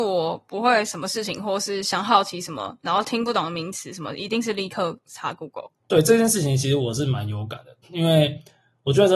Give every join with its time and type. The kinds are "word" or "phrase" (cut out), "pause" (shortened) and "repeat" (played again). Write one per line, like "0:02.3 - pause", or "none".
0:05.8 - pause
0:07.8 - pause